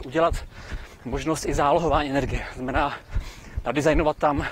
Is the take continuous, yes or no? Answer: yes